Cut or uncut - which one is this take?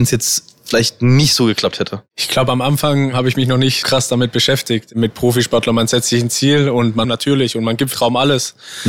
cut